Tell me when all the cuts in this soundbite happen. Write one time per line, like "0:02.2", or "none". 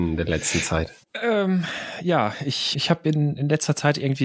0:01.0
0:02.7